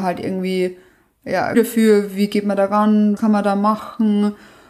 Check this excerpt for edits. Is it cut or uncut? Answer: cut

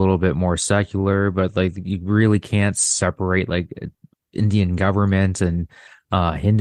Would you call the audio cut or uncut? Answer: uncut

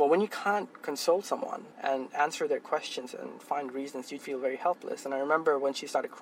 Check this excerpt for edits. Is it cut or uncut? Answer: cut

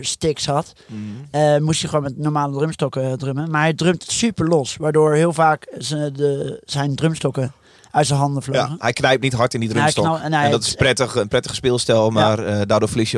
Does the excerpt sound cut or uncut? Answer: uncut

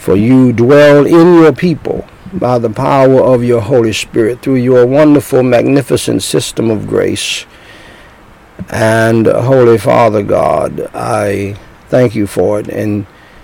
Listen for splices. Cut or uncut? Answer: uncut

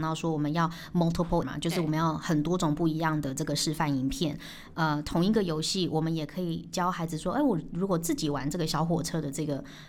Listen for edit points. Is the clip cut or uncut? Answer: cut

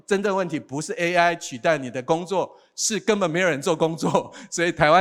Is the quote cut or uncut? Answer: uncut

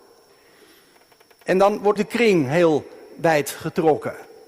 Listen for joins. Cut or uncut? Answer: cut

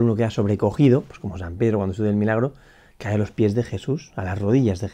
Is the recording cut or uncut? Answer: uncut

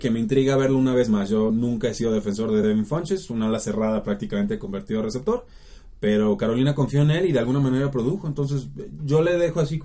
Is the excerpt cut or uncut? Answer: uncut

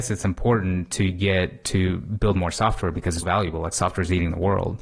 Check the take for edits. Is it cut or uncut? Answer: cut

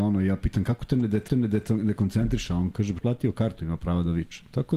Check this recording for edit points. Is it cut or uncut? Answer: cut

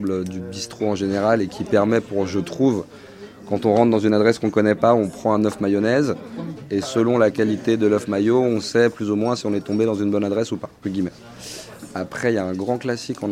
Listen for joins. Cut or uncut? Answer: cut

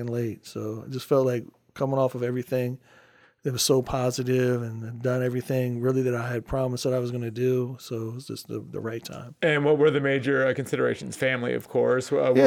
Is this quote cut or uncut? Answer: uncut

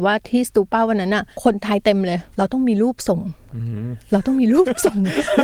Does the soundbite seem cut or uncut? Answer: cut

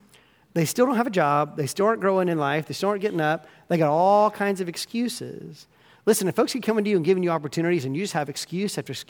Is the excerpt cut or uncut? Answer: uncut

